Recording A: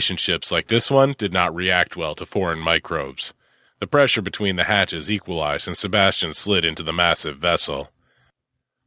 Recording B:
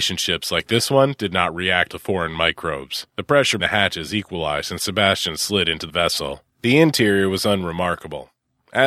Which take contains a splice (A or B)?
B